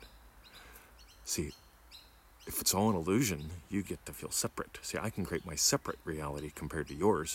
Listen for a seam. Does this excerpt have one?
no; 0 cuts

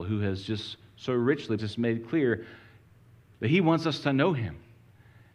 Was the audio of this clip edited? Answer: yes; 1 cut; at 1.6 s

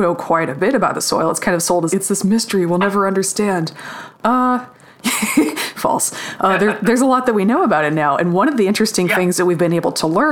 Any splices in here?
yes; 1 cut; at 1.9 s

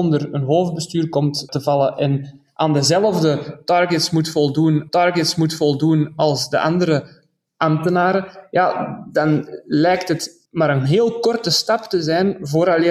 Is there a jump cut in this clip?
yes; 3 cuts; at 1.5 s, 4.9 s, 10.5 s

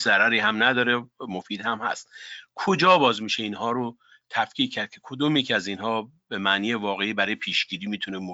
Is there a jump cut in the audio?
no; 0 cuts

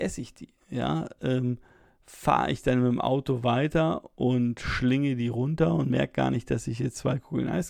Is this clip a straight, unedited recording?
yes; 0 cuts

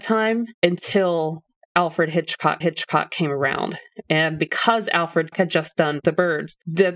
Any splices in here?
yes; 2 cuts; at 2.6 s, 5.3 s

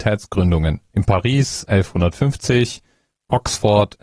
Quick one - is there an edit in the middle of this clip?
yes; 1 cut; at 1.7 s

